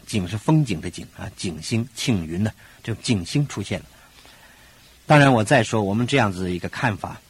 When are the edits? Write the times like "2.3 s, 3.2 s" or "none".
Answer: none